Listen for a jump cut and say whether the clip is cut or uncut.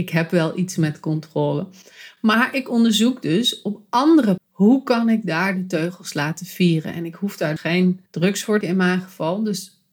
cut